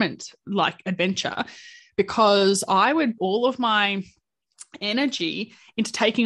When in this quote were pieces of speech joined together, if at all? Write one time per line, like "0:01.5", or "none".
0:03.2

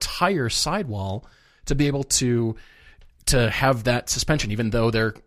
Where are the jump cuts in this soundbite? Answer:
none

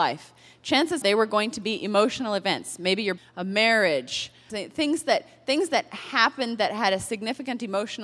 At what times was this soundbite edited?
0:01.0
0:03.2
0:04.5

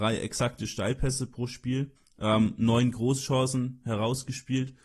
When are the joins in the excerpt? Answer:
0:02.0

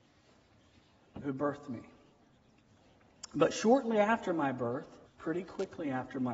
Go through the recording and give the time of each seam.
0:05.0

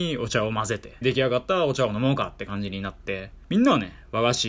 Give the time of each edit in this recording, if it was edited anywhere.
0:01.0
0:03.4

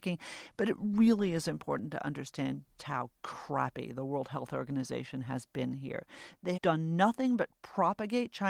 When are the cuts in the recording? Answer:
0:02.8
0:06.6

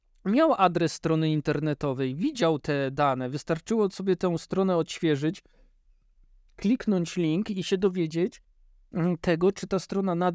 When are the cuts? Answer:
none

